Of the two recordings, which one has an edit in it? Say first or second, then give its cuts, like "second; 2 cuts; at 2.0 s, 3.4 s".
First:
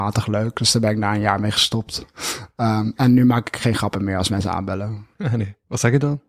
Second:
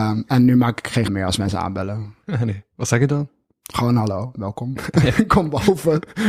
second; 1 cut; at 1.1 s